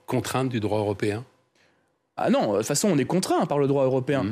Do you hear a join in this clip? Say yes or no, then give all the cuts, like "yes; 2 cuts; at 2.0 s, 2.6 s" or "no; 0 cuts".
no; 0 cuts